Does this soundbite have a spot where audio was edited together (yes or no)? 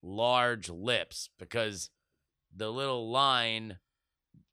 no